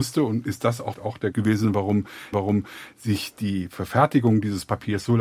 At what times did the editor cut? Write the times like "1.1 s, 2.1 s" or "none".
0.9 s, 1.3 s, 2.3 s